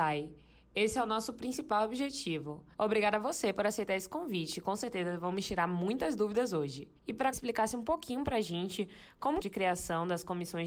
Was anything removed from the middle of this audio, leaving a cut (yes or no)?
yes